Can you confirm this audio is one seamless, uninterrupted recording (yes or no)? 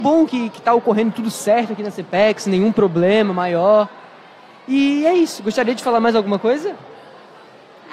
yes